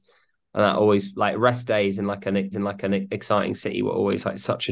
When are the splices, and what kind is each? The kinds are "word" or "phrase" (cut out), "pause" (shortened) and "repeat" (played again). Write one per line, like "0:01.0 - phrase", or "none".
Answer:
0:02.5 - repeat